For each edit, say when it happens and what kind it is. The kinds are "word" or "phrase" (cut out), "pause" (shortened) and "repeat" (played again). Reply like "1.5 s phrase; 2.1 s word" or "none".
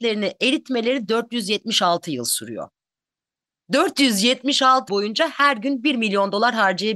4.9 s word